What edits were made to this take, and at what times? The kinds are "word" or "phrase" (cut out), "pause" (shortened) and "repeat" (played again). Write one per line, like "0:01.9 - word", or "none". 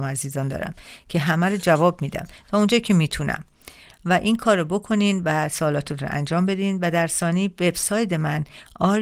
none